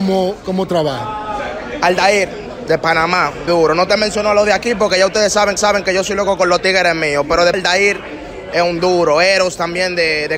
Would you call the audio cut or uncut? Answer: cut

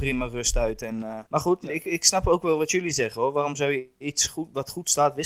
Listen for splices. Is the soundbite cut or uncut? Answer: cut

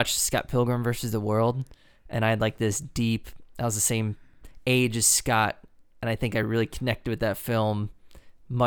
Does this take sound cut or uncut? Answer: uncut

